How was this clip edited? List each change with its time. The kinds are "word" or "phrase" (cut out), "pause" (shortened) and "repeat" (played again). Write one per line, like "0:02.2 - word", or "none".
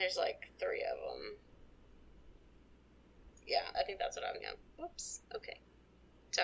0:03.7 - word
0:04.4 - word